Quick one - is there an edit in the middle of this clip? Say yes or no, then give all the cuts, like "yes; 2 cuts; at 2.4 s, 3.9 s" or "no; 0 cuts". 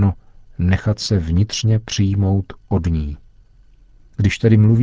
no; 0 cuts